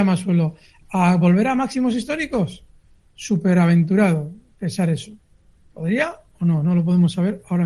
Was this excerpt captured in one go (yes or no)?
yes